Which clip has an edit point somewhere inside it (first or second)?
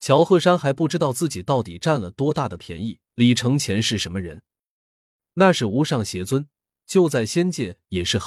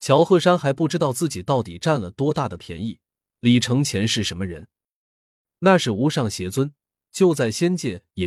first